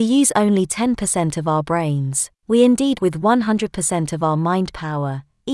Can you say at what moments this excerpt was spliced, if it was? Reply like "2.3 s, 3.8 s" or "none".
2.4 s, 3.0 s

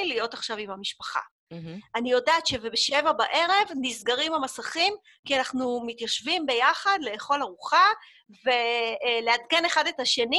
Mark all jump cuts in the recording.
none

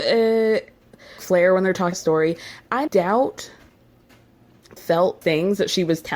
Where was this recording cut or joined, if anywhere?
1.2 s, 1.9 s, 2.9 s, 4.8 s, 5.2 s

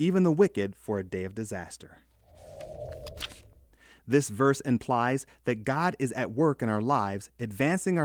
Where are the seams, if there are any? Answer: none

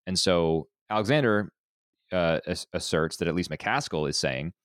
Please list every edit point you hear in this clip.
none

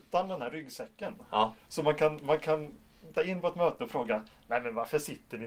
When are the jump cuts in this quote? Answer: 3.2 s

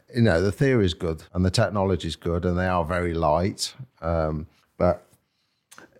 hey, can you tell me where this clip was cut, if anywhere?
1.3 s, 4.6 s

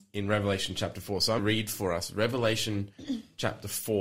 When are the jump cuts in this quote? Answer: 1.4 s

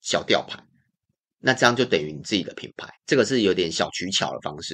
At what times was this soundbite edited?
3.0 s

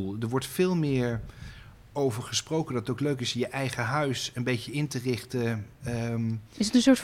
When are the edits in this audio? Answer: none

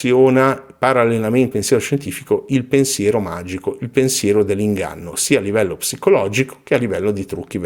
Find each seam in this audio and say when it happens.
1.5 s

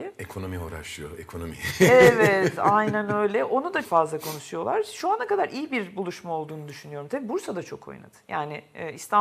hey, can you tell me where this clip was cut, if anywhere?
3.8 s

